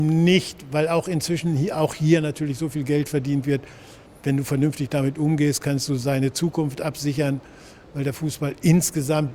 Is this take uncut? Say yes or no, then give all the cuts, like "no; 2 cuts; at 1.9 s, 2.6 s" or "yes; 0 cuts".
no; 1 cut; at 4.1 s